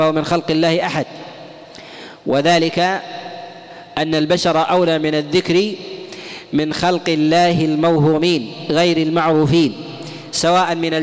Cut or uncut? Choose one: uncut